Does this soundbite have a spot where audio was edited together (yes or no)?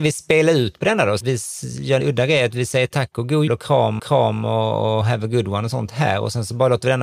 yes